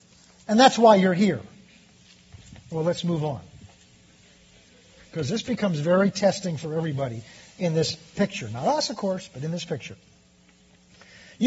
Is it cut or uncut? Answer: uncut